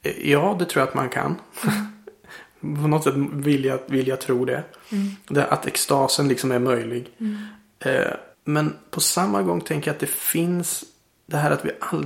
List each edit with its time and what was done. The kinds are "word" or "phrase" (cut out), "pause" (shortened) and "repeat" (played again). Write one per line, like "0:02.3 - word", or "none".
0:08.3 - pause